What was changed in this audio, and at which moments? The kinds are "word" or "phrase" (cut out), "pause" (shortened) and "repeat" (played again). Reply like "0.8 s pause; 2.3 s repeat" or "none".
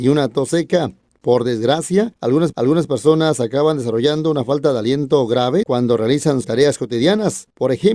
2.5 s repeat; 5.6 s word; 6.4 s phrase